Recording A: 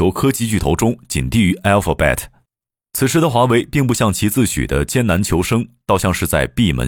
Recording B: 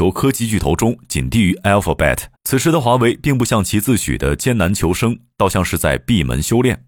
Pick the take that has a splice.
B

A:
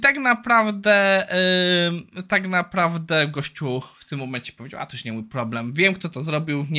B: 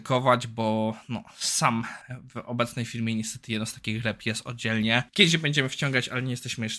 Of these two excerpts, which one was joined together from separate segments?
B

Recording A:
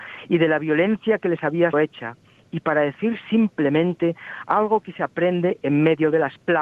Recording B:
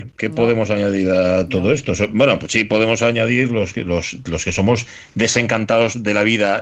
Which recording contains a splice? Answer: A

